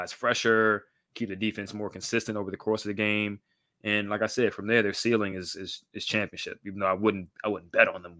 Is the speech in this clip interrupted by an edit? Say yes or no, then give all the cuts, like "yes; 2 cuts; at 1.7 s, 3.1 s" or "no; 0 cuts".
no; 0 cuts